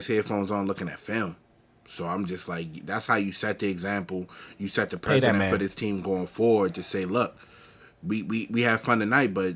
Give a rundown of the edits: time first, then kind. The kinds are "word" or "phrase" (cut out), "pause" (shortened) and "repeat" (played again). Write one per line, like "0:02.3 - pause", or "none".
none